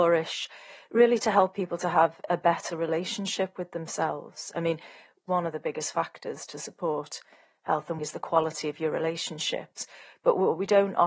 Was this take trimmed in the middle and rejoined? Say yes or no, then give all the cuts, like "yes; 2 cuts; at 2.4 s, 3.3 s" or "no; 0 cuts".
yes; 1 cut; at 8.0 s